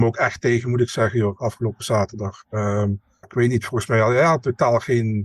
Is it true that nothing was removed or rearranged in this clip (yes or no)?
no